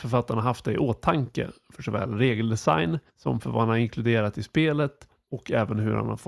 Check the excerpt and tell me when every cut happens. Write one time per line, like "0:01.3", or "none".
0:03.1